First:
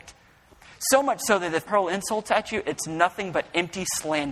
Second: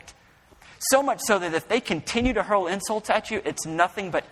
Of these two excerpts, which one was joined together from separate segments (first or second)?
first